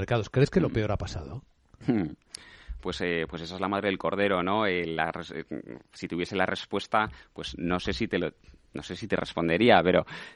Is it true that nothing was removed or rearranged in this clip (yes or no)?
yes